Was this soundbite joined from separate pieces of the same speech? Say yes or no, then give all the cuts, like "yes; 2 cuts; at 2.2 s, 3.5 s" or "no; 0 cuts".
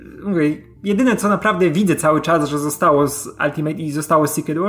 no; 0 cuts